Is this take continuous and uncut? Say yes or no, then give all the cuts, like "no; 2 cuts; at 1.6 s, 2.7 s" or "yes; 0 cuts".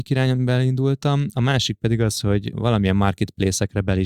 yes; 0 cuts